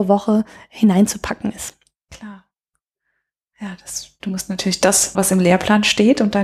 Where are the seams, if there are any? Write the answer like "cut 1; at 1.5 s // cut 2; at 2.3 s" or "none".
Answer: cut 1; at 5.1 s